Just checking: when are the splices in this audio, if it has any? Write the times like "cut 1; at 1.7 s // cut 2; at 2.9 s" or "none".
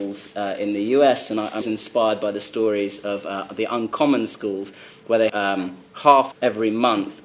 cut 1; at 1.6 s // cut 2; at 5.3 s // cut 3; at 6.3 s